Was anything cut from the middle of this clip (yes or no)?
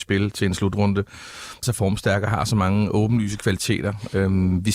yes